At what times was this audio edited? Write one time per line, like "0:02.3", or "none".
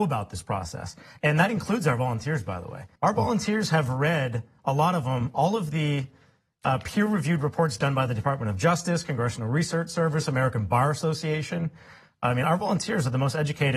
0:03.0